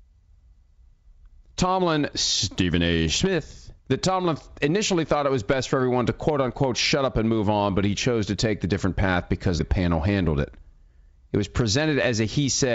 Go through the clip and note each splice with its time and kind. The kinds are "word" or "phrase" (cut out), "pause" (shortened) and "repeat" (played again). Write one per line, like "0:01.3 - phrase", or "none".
0:02.1 - word
0:03.8 - pause
0:09.6 - phrase